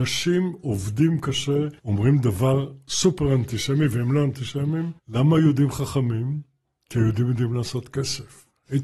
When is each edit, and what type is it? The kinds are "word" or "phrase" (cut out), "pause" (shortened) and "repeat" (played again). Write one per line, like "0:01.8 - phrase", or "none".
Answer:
0:01.8 - pause
0:05.0 - pause